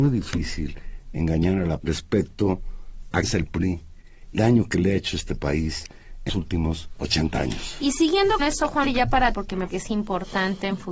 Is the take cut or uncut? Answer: cut